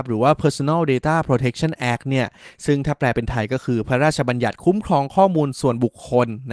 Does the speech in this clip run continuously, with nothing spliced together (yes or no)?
yes